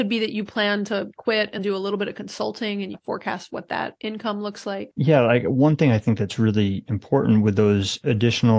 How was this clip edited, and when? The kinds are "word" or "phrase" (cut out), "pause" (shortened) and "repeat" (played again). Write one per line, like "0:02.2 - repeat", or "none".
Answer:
0:01.6 - word
0:02.9 - phrase